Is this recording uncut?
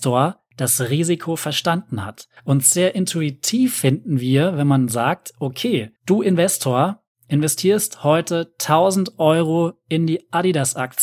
no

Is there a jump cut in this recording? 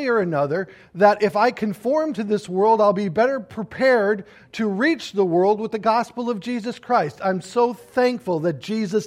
no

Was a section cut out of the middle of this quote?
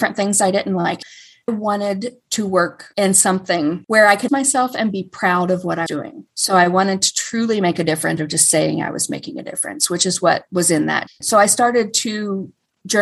yes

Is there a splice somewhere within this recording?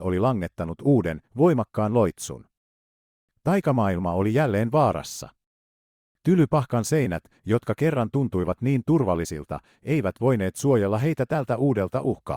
no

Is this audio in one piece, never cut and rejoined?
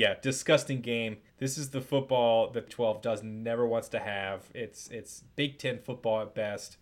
no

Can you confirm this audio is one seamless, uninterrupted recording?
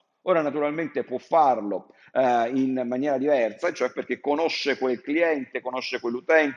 yes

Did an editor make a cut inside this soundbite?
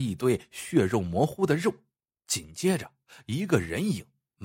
no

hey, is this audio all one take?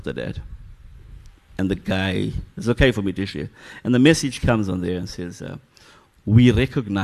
yes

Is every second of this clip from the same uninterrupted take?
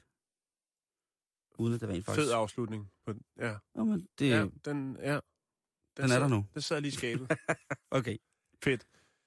yes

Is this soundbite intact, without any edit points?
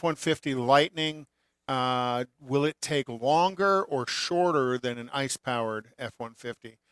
yes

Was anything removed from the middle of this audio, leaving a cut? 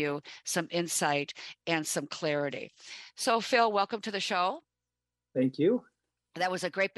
no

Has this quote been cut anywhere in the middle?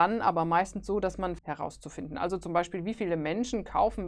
yes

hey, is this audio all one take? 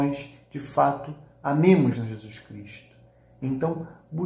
no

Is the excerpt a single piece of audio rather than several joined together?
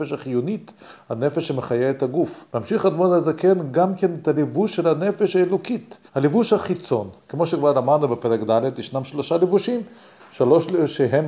no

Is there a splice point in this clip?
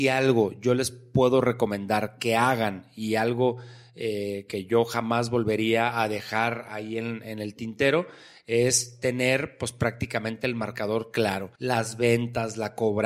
yes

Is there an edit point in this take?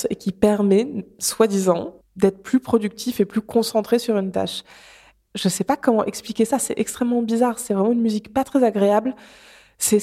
no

